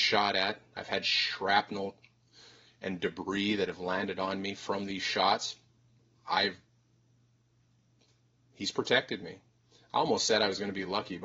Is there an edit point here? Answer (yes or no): no